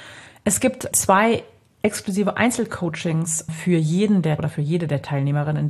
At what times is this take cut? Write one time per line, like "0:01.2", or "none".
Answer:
0:00.9
0:03.5
0:04.4